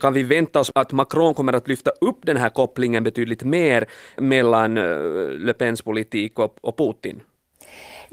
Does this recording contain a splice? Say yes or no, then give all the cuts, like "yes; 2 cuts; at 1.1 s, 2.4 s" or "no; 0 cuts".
no; 0 cuts